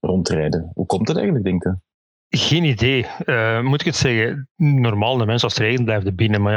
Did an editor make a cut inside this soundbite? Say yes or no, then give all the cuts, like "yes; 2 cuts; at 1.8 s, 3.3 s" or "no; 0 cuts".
no; 0 cuts